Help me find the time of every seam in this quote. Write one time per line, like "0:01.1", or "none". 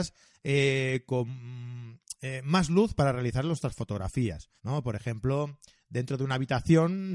0:04.6